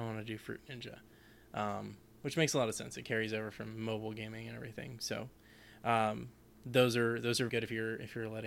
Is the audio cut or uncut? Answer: cut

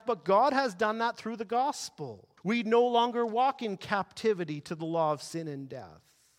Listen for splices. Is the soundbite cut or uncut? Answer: cut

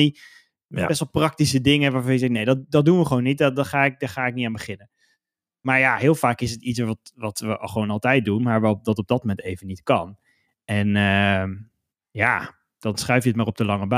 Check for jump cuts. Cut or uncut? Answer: uncut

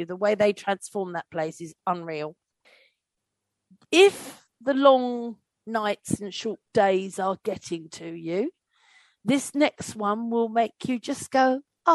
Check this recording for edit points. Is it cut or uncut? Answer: uncut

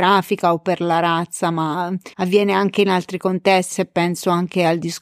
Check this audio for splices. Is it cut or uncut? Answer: cut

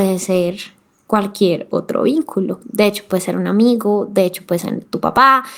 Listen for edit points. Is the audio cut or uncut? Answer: uncut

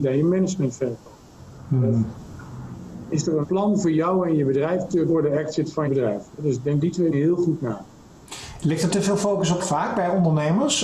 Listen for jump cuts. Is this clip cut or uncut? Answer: cut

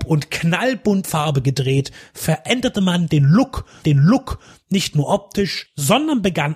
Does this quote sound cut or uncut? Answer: cut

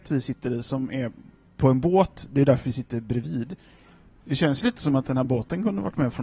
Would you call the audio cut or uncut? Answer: uncut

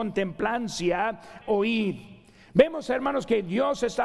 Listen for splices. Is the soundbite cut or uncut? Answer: cut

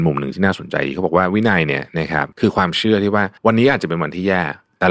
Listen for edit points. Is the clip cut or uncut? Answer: cut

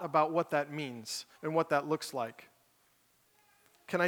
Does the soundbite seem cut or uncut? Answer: cut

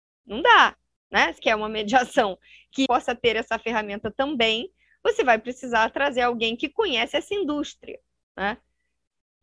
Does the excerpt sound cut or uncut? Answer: cut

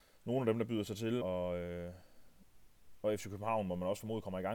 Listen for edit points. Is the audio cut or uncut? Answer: cut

